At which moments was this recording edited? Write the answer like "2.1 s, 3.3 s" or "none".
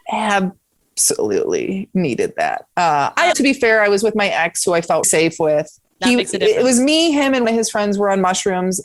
3.3 s, 5.0 s, 5.8 s, 7.4 s